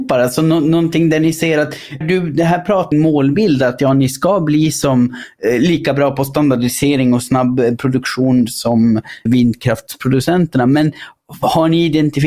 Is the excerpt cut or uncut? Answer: cut